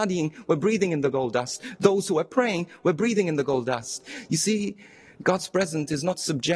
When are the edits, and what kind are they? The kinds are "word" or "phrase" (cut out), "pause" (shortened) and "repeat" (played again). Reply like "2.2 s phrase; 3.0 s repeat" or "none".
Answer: none